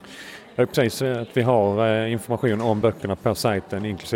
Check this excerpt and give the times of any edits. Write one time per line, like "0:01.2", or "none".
none